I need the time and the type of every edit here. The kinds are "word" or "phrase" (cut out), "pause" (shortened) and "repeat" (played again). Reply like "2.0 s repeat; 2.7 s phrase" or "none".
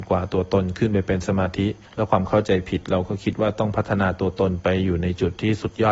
1.9 s pause